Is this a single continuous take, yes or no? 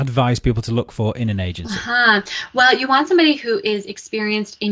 yes